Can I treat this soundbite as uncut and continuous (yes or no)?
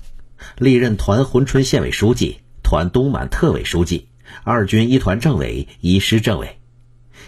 yes